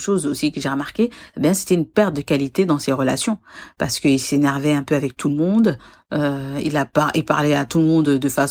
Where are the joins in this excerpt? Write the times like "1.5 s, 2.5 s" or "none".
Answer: none

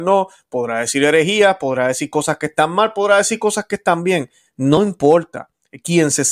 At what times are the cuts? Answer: none

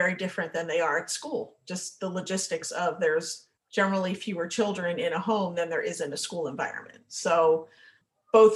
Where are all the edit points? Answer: 3.6 s

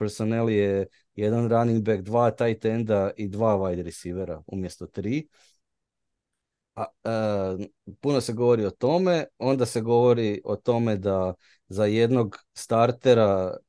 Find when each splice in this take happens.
none

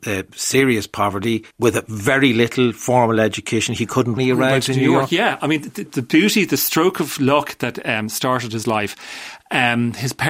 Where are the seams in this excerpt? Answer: 1.5 s, 4.2 s, 5.9 s

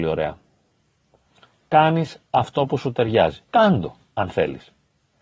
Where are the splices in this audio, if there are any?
3.5 s

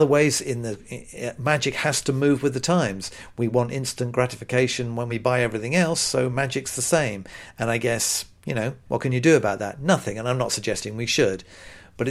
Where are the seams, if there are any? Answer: none

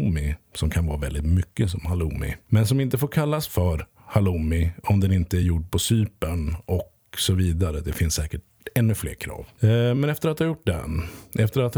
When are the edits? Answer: none

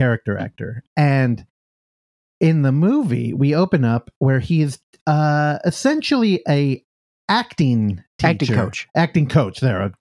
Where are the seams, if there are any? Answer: none

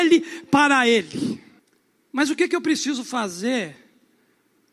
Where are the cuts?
1.6 s

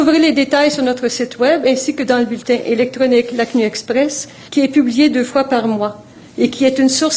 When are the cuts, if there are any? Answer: 4.5 s

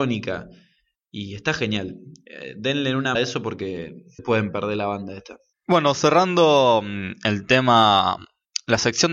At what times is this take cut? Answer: 3.2 s, 4.2 s, 5.5 s

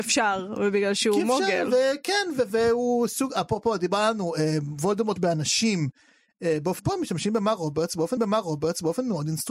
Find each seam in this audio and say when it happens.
5.2 s, 6.8 s, 8.2 s

